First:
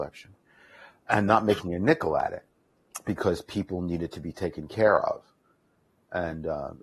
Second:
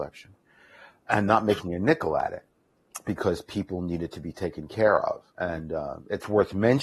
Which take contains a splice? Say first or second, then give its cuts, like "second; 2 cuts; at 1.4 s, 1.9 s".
second; 1 cut; at 5.3 s